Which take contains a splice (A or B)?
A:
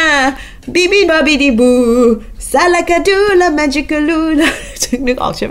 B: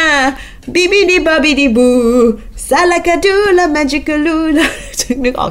A